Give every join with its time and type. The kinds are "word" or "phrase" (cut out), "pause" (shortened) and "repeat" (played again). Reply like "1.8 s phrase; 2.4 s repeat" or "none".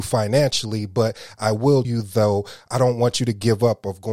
1.8 s word